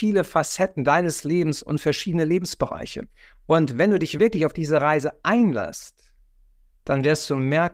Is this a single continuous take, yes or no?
yes